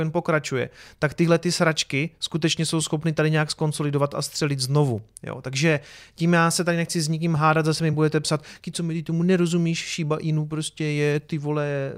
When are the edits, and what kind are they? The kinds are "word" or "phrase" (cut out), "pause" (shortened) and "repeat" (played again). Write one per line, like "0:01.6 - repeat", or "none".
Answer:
none